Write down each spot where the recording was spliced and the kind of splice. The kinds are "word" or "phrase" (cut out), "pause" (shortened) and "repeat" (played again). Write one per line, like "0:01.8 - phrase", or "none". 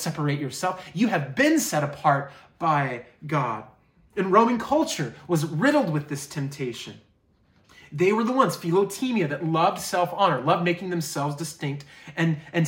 none